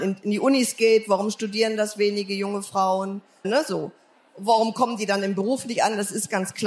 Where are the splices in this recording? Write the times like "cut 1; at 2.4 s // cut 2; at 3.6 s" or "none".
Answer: cut 1; at 3.4 s